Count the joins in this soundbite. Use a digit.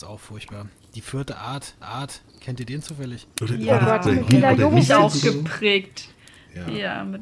3